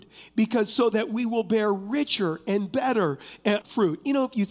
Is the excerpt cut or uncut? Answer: cut